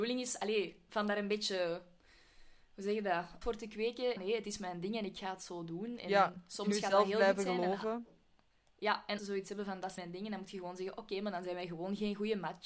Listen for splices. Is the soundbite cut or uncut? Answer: cut